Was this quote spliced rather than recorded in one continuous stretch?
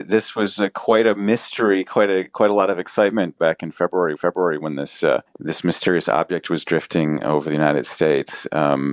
yes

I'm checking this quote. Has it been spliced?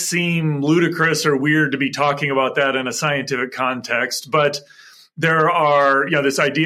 no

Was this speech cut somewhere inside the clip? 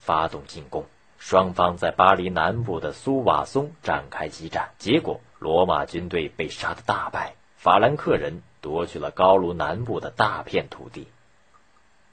yes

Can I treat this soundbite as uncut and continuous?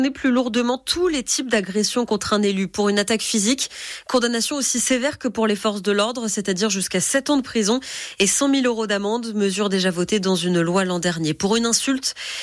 yes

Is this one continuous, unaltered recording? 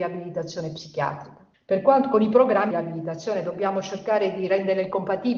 no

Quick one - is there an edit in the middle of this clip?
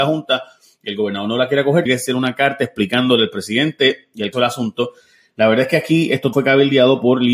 yes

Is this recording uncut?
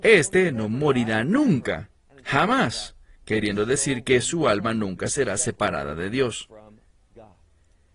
yes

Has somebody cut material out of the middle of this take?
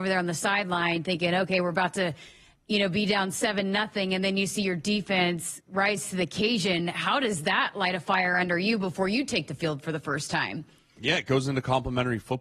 no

